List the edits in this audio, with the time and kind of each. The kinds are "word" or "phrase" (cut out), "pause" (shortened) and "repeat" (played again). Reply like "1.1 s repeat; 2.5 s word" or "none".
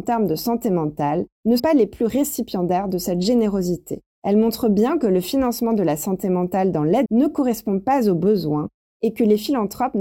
1.6 s word; 4.1 s pause; 7.1 s phrase